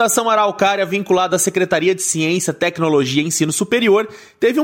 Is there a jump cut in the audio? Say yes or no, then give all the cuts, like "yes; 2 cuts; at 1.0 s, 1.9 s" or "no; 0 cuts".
no; 0 cuts